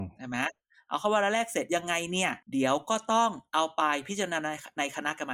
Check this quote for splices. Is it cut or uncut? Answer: cut